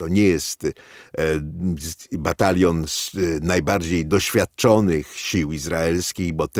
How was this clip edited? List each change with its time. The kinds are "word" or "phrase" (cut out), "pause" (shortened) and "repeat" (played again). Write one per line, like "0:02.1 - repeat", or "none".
none